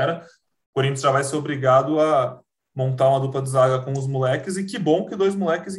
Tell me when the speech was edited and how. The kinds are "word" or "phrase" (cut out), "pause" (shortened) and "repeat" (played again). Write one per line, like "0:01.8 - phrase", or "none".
none